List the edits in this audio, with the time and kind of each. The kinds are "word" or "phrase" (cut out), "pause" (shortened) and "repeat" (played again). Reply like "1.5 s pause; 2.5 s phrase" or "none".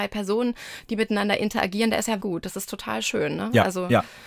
2.2 s word